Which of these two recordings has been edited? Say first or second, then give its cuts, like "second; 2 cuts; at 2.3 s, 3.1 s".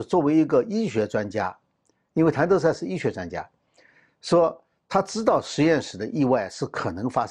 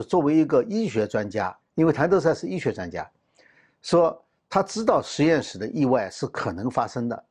second; 1 cut; at 1.6 s